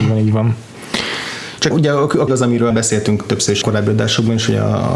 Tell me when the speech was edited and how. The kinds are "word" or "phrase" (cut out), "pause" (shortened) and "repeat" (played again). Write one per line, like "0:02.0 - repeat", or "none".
0:01.7 - word
0:02.3 - word
0:02.7 - word
0:03.6 - word